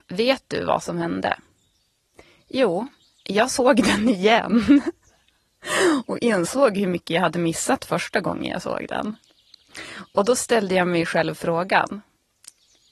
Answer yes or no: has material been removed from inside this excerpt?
no